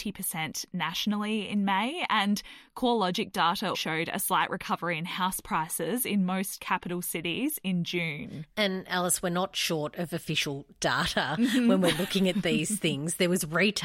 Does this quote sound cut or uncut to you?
cut